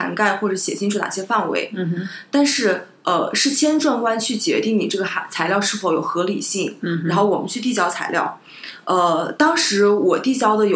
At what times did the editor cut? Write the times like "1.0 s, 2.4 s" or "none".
none